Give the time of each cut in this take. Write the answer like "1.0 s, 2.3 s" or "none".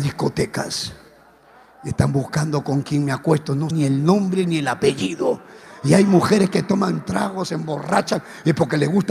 3.7 s